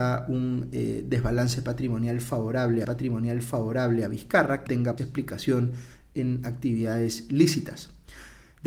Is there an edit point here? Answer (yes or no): yes